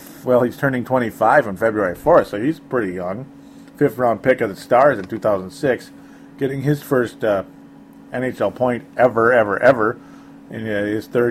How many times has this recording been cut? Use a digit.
0